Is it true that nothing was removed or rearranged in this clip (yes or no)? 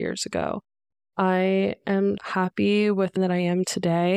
no